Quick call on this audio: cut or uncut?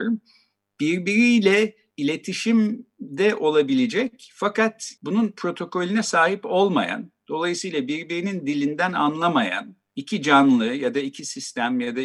cut